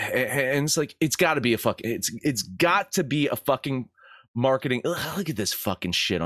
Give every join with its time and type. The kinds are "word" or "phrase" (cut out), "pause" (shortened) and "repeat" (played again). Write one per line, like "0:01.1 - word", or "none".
none